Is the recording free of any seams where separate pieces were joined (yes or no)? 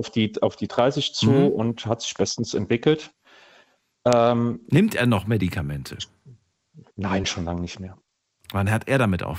yes